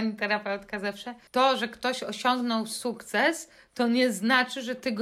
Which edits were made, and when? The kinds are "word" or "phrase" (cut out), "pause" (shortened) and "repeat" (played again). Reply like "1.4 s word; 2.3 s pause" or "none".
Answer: 1.3 s pause